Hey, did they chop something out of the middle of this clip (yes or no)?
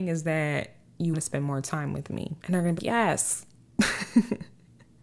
yes